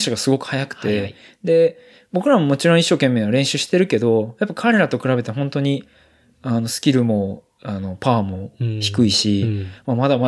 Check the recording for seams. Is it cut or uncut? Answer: uncut